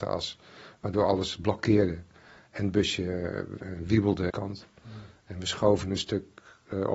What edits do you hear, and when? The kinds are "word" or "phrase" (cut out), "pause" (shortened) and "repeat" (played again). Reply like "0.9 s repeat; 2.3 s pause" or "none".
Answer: 4.3 s phrase